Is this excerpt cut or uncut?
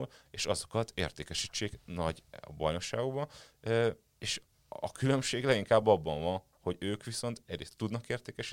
uncut